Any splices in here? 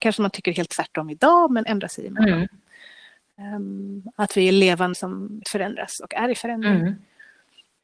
yes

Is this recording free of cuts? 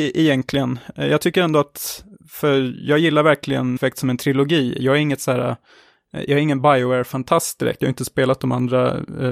no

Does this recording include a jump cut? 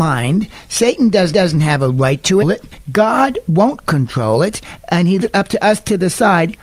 yes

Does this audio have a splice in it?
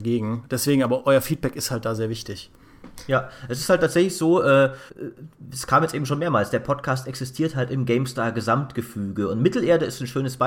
yes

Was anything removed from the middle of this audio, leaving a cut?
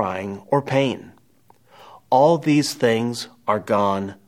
no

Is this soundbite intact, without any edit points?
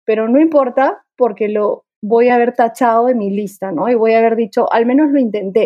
yes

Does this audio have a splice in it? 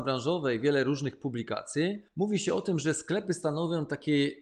yes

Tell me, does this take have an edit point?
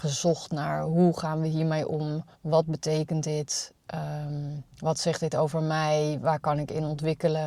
yes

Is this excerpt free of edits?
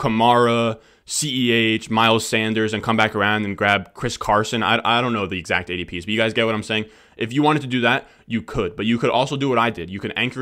yes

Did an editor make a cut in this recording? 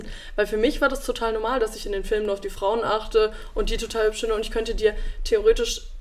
no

